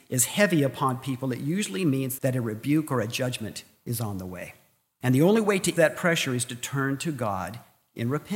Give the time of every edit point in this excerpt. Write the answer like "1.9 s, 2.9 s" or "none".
2.2 s, 5.8 s